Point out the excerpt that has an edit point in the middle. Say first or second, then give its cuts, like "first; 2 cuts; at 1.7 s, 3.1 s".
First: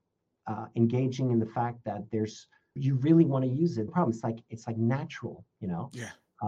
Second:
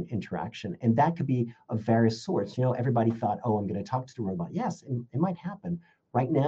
first; 2 cuts; at 2.8 s, 3.9 s